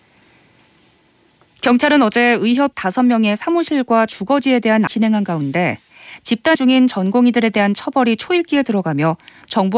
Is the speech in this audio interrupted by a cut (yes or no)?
yes